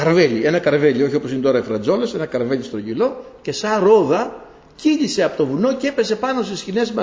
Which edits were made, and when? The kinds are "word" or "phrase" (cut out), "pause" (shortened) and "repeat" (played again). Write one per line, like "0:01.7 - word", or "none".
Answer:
none